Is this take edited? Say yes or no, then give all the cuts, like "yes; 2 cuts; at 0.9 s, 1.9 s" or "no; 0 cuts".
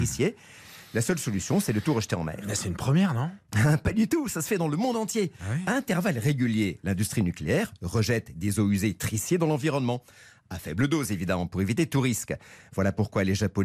no; 0 cuts